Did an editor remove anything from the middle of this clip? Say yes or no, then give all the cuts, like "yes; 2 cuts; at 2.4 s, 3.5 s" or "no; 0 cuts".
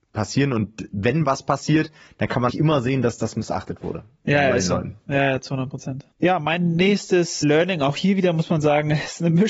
yes; 3 cuts; at 2.5 s, 6.1 s, 7.4 s